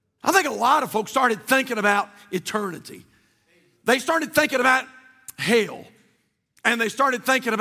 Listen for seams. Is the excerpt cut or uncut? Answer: uncut